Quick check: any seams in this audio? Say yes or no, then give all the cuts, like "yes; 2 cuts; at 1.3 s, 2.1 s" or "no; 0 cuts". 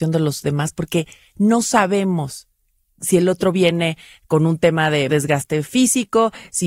yes; 1 cut; at 5.1 s